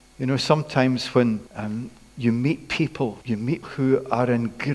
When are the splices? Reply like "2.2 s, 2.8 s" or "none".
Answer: 1.5 s, 3.2 s, 3.6 s